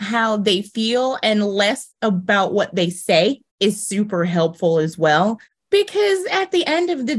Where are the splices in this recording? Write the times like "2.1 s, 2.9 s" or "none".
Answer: 3.5 s